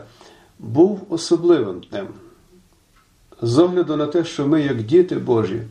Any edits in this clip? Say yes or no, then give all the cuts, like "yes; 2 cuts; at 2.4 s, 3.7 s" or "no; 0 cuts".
no; 0 cuts